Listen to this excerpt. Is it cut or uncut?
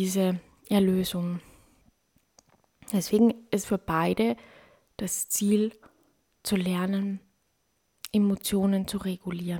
cut